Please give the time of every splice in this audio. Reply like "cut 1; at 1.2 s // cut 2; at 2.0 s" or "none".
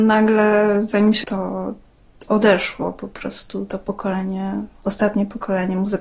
cut 1; at 1.2 s